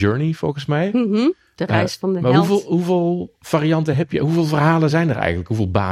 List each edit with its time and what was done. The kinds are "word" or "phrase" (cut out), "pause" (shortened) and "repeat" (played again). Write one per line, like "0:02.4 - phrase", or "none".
none